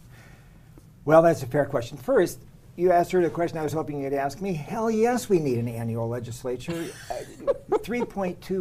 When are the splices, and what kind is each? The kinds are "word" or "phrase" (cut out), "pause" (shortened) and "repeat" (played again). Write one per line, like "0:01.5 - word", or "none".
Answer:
none